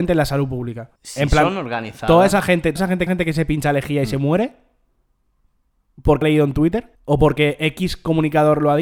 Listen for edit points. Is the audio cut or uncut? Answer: cut